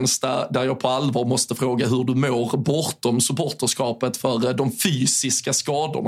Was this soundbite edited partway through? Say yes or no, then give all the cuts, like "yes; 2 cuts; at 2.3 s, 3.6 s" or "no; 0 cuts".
no; 0 cuts